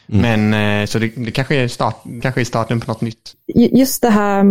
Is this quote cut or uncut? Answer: cut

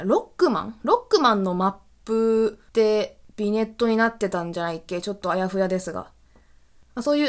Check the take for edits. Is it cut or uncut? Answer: cut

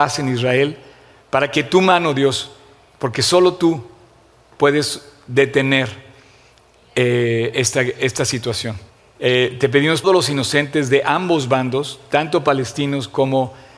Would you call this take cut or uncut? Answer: cut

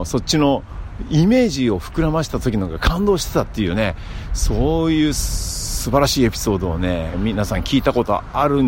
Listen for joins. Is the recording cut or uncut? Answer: cut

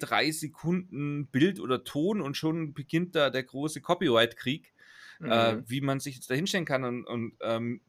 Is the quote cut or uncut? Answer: uncut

